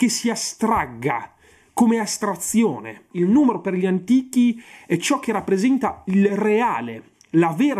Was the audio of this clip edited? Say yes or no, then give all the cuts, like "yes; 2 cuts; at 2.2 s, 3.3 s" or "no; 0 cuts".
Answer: no; 0 cuts